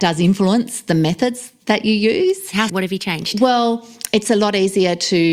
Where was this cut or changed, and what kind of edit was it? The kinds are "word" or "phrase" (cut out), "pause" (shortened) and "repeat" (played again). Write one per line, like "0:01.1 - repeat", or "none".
0:02.7 - word